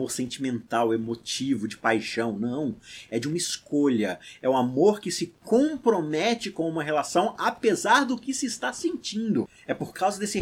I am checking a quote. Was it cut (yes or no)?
no